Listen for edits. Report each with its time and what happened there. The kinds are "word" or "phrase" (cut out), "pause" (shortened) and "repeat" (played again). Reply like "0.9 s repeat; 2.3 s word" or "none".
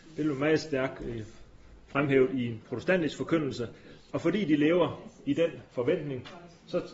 none